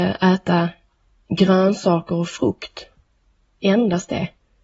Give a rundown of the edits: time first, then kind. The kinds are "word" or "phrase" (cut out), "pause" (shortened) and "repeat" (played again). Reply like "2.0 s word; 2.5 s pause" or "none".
none

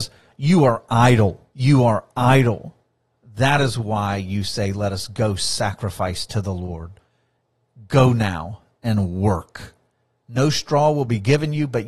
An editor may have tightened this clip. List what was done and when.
1.5 s pause

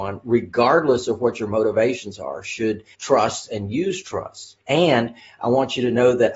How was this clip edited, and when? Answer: 2.9 s word; 4.6 s pause

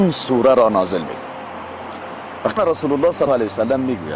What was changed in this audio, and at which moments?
2.6 s word; 3.3 s word

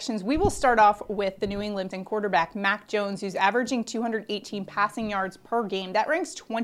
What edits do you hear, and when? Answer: 1.9 s word

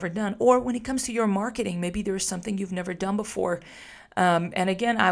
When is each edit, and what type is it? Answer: none

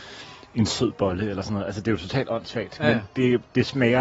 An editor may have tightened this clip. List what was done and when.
none

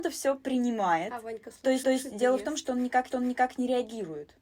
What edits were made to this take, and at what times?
1.8 s repeat; 3.1 s repeat

